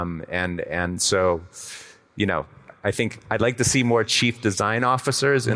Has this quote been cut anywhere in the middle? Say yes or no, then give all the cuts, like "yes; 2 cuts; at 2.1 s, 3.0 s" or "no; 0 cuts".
no; 0 cuts